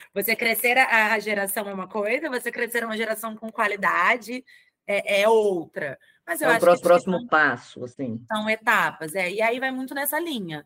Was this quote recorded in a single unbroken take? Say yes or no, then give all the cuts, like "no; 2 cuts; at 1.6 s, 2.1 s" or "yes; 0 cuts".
no; 1 cut; at 6.8 s